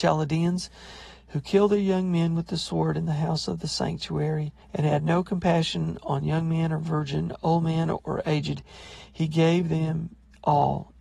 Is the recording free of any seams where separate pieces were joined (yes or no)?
no